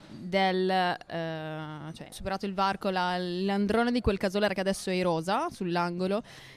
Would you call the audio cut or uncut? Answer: cut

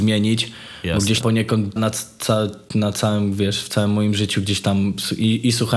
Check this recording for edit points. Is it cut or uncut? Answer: cut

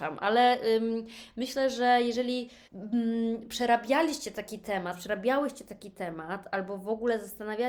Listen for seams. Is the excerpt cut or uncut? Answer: cut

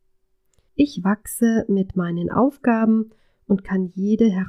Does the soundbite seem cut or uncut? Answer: uncut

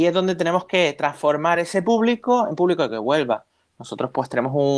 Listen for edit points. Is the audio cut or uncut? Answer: uncut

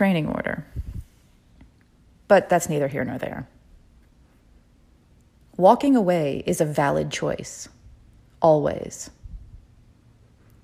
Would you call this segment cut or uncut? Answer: uncut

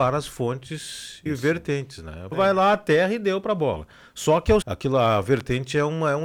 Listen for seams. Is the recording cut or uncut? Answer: cut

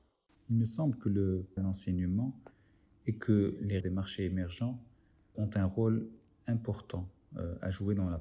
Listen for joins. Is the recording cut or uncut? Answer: cut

